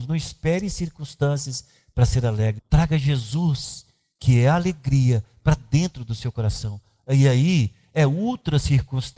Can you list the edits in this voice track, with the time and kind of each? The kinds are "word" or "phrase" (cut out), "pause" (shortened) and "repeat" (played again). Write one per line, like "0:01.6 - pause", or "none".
0:02.6 - word

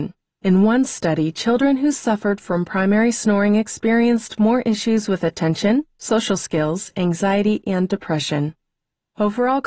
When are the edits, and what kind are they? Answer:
none

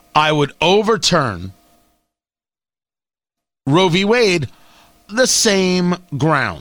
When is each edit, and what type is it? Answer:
0:05.1 - word

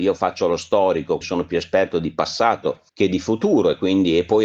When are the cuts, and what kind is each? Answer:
0:01.2 - word
0:02.9 - pause

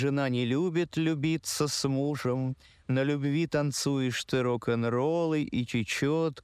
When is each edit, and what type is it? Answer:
none

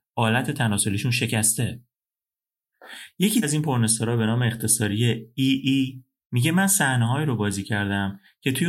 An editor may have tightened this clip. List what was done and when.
0:03.4 - word

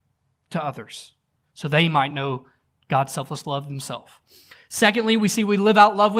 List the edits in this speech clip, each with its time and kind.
none

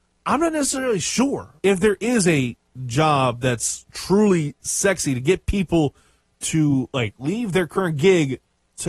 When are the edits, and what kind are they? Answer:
0:01.6 - pause

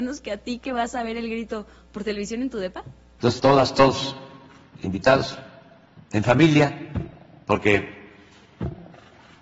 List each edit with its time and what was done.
0:03.4 - word
0:06.1 - word

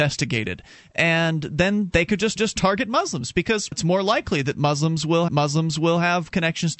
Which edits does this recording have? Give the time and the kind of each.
0:02.4 - repeat
0:03.7 - word
0:05.3 - repeat

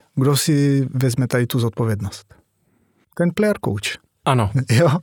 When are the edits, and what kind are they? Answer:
none

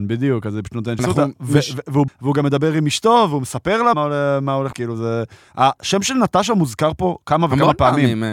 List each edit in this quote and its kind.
0:01.0 - word
0:02.1 - word
0:03.9 - word
0:04.7 - word

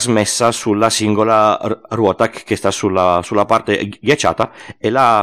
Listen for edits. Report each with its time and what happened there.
none

